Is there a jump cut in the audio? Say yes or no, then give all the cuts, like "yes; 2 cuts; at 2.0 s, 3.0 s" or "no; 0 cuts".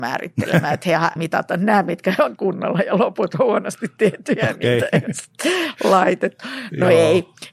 yes; 2 cuts; at 1.2 s, 2.4 s